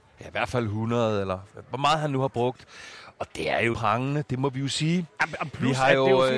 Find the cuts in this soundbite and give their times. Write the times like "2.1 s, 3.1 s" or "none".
3.7 s

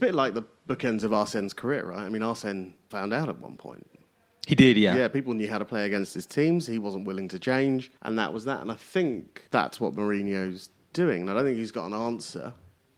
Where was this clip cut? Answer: 2.9 s, 8.0 s, 9.5 s

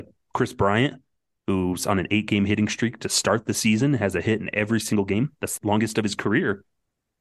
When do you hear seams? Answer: 5.6 s

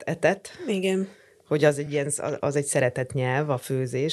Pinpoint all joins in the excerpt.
none

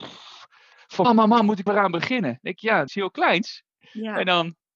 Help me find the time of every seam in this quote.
1.0 s, 1.7 s, 2.9 s

